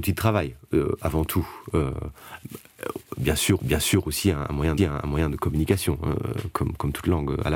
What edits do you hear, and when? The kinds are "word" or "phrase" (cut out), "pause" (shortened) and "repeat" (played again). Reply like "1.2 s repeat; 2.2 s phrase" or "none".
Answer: 3.6 s repeat; 4.8 s repeat

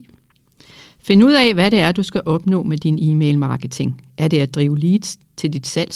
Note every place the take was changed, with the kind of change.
none

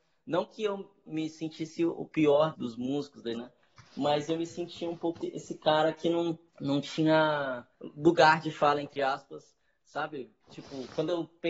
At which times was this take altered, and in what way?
1.1 s word; 2.5 s word; 3.3 s word; 5.2 s word; 6.5 s pause; 7.7 s pause

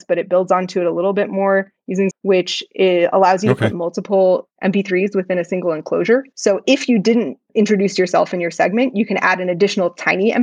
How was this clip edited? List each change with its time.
2.1 s phrase

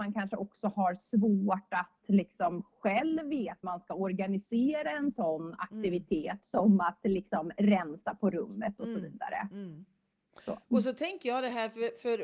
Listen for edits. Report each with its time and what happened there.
3.6 s word; 10.6 s pause

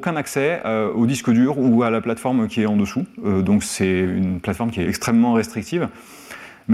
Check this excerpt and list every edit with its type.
4.8 s word

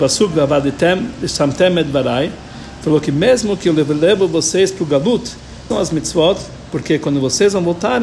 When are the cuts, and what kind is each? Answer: 5.7 s word

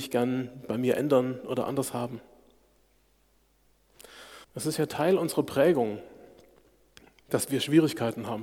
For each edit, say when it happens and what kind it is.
4.4 s pause

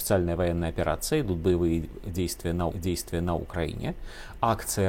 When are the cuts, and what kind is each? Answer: 2.7 s repeat

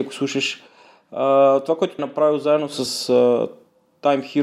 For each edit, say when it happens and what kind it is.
2.0 s phrase; 2.9 s word

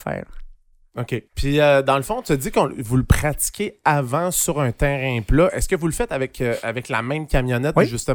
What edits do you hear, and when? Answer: 1.3 s pause

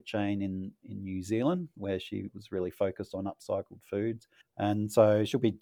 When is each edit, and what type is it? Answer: 4.4 s pause

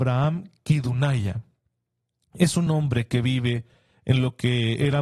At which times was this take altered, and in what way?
none

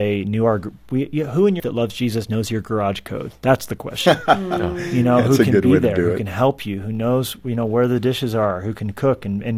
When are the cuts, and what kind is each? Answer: 1.6 s word

